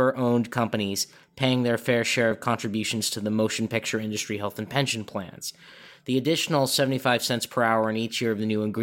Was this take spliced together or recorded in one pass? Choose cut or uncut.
uncut